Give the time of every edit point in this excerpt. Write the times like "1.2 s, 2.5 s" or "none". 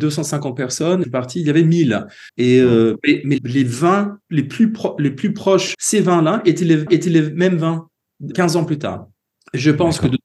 1.0 s, 2.3 s, 3.4 s, 4.2 s, 5.7 s, 6.9 s, 8.3 s